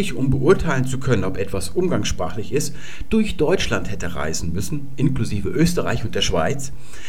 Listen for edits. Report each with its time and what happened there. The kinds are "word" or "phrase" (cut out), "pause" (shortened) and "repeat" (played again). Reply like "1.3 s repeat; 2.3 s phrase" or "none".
none